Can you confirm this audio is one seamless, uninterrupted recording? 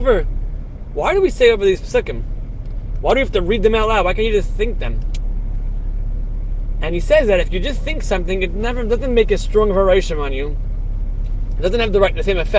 yes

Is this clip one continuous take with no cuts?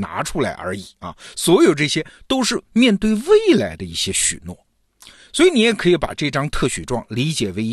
yes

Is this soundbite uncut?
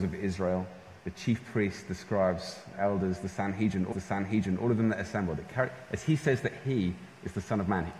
no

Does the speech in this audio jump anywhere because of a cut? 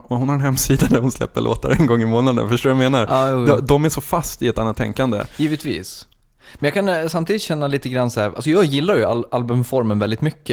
no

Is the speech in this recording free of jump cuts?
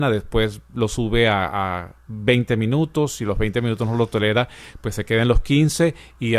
yes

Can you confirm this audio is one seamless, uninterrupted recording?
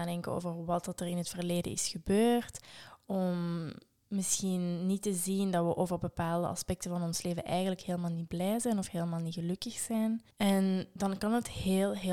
no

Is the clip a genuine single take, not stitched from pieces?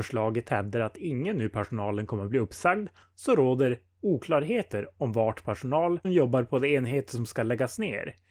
no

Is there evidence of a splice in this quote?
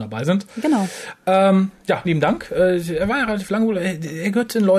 yes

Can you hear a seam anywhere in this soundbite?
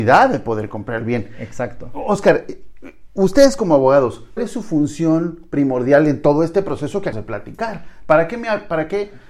yes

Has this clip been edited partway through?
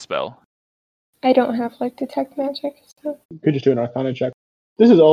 yes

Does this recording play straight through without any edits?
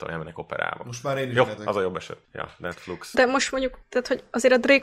no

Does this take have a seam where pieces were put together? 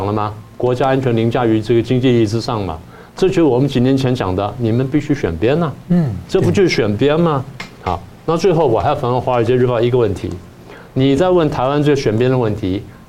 yes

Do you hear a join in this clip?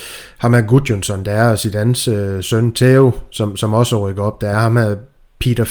no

